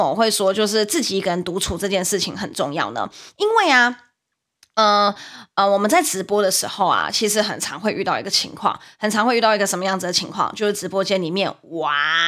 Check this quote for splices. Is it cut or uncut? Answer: uncut